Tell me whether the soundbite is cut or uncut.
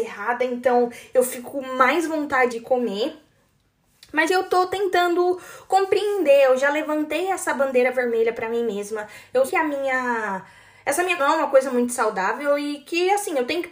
cut